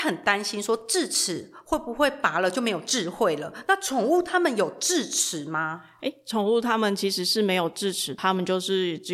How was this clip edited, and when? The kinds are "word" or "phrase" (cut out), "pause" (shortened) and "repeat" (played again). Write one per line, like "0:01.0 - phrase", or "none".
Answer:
0:08.2 - word